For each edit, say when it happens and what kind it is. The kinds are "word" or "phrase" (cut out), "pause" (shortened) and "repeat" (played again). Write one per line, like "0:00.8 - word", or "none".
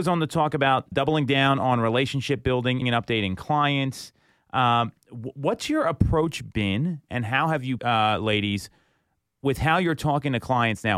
0:00.9 - word
0:02.8 - word
0:07.8 - word